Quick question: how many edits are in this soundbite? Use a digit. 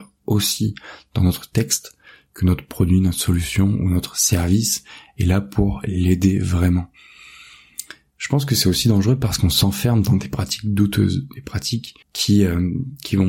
1